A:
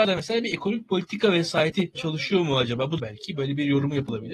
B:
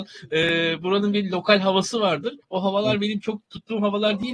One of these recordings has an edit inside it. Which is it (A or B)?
A